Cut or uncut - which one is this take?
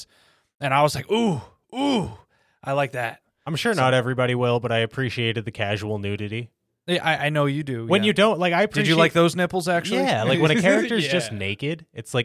uncut